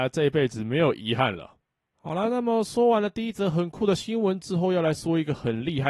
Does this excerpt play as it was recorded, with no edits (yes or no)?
yes